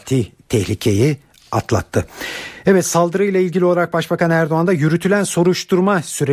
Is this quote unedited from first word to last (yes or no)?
yes